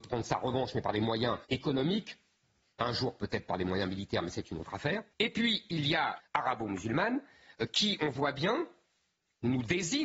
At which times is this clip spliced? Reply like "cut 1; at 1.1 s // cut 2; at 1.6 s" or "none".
cut 1; at 1.4 s // cut 2; at 5.1 s // cut 3; at 6.2 s

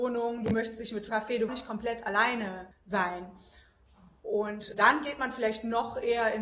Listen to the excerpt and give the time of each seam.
cut 1; at 1.1 s // cut 2; at 1.5 s // cut 3; at 2.7 s // cut 4; at 4.7 s

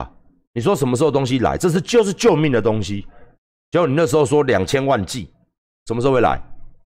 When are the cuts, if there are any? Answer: none

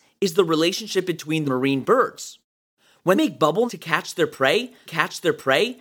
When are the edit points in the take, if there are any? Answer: cut 1; at 1.4 s // cut 2; at 3.1 s // cut 3; at 3.7 s // cut 4; at 4.8 s

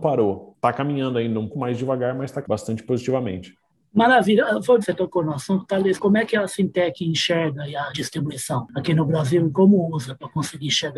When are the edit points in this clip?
cut 1; at 1.5 s // cut 2; at 2.4 s // cut 3; at 4.8 s // cut 4; at 7.9 s

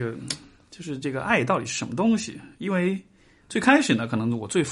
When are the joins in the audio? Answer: none

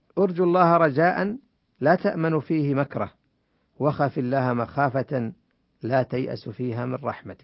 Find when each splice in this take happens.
none

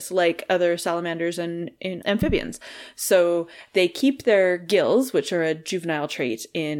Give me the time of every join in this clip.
cut 1; at 2.0 s

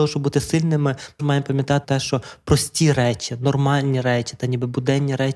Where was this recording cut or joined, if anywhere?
cut 1; at 1.2 s // cut 2; at 1.8 s

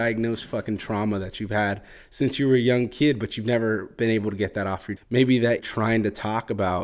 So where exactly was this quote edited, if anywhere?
cut 1; at 5.0 s // cut 2; at 5.6 s

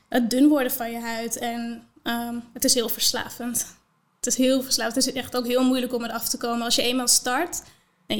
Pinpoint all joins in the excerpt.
none

